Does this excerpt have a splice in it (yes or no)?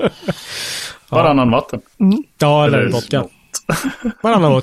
no